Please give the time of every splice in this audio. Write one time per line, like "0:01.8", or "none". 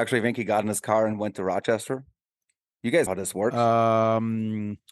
0:03.1